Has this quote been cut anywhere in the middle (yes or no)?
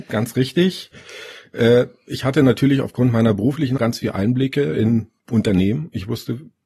yes